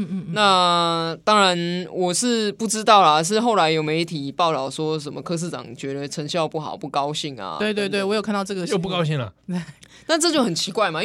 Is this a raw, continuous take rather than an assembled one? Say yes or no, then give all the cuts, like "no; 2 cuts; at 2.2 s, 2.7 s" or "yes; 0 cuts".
yes; 0 cuts